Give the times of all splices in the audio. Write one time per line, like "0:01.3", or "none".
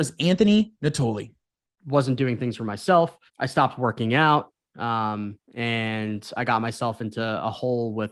0:03.3
0:05.4